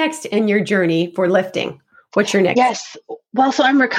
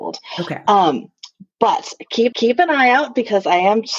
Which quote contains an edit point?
second; 1 cut; at 2.3 s

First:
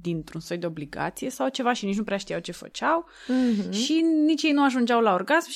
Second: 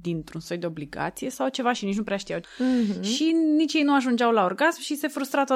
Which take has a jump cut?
second; 1 cut; at 2.4 s

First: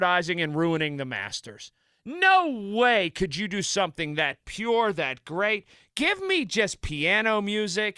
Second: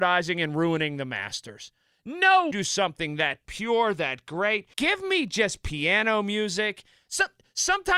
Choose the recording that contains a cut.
second; 2 cuts; at 2.5 s, 4.7 s

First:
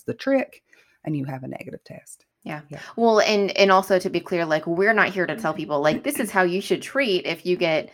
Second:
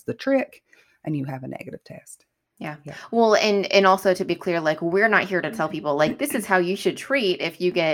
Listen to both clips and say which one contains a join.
first; 1 cut; at 2.3 s

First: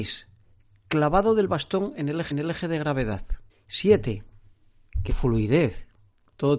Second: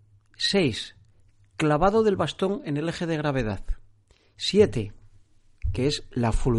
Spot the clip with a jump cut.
first; 3 cuts; at 2.3 s, 3.5 s, 5.1 s

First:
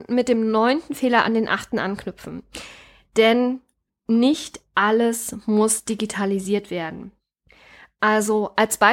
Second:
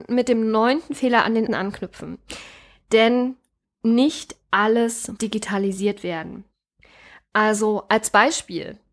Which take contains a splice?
second; 2 cuts; at 1.5 s, 5.2 s

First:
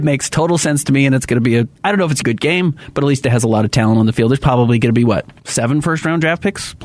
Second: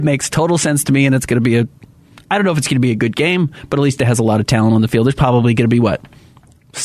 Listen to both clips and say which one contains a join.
first; 3 cuts; at 1.8 s, 2.2 s, 5.4 s

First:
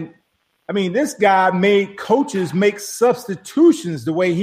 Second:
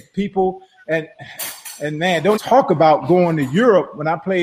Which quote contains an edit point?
second; 1 cut; at 2.4 s

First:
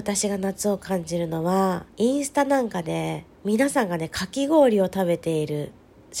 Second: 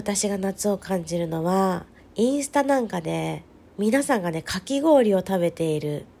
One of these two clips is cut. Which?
first; 2 cuts; at 1.9 s, 3.3 s

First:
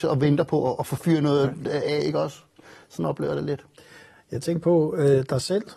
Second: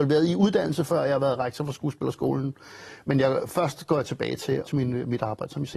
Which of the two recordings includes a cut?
second; 1 cut; at 4.7 s

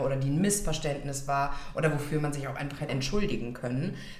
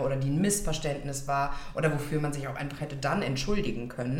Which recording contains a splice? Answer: first; 1 cut; at 2.9 s

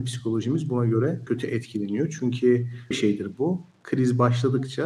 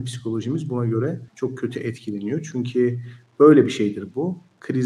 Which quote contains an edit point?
first; 2 cuts; at 1.3 s, 2.9 s

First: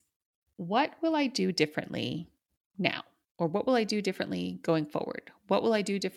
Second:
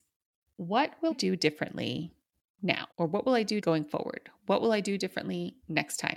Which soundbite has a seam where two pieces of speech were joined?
second; 3 cuts; at 1.1 s, 2.9 s, 3.6 s

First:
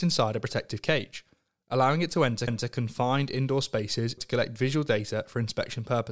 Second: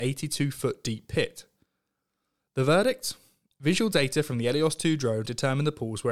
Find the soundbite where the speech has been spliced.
first; 2 cuts; at 2.5 s, 4.2 s

